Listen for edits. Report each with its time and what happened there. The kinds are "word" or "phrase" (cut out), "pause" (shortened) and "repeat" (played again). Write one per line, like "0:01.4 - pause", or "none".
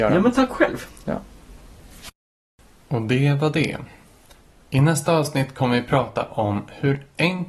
none